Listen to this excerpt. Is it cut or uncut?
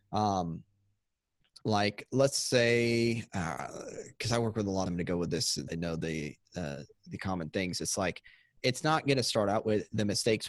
cut